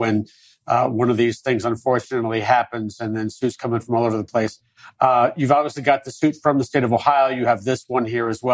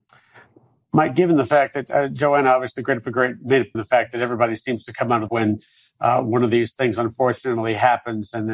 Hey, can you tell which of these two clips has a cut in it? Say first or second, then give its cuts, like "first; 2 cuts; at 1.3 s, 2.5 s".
second; 2 cuts; at 3.7 s, 5.3 s